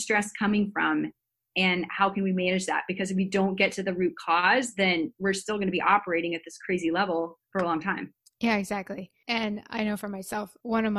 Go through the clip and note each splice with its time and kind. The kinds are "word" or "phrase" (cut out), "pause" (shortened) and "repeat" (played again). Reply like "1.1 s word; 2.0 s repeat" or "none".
none